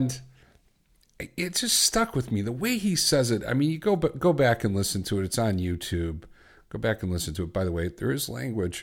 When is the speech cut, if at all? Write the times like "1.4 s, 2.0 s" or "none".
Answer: none